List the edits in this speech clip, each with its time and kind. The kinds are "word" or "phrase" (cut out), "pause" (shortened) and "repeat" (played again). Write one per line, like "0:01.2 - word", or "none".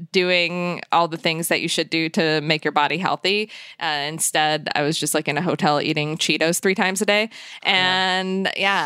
none